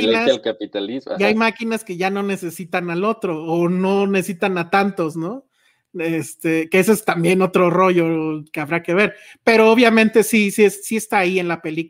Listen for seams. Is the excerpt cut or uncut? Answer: uncut